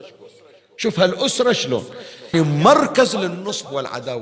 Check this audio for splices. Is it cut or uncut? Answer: cut